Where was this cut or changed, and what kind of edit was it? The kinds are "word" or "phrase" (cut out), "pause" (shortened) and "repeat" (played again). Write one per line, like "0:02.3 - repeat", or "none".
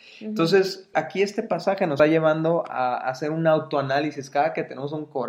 0:00.9 - word
0:02.0 - word